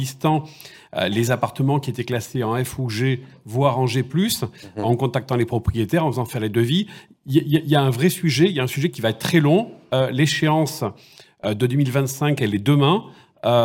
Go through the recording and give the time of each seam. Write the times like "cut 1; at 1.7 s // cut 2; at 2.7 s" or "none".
none